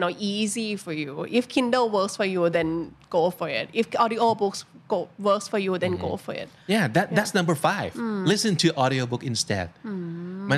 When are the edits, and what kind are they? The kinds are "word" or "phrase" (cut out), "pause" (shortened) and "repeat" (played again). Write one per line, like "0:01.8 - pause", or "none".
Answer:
none